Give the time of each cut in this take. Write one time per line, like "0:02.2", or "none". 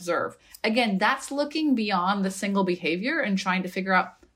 none